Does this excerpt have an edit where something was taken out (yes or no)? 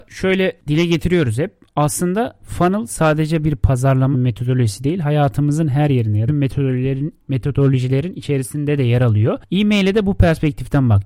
yes